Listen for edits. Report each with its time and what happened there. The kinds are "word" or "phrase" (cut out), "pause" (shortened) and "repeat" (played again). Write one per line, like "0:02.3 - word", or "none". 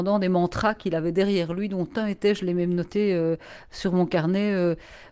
none